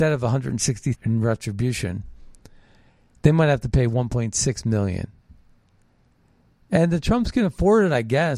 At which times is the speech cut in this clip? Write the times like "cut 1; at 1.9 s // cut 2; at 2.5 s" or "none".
cut 1; at 0.9 s